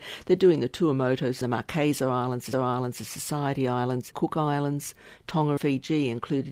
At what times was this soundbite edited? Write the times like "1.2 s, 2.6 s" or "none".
1.4 s, 2.5 s, 4.1 s, 5.6 s